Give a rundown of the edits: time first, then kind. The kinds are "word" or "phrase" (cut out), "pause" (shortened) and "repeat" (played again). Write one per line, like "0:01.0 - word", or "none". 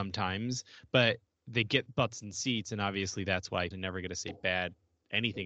0:03.7 - word